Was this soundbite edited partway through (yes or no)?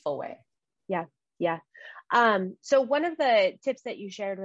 no